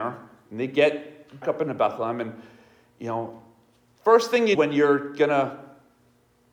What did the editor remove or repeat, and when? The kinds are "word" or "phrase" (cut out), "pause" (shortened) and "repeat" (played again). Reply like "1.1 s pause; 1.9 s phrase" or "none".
1.4 s word; 4.5 s word